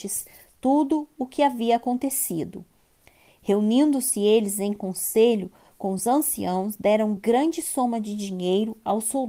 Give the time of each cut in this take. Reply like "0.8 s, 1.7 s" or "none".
none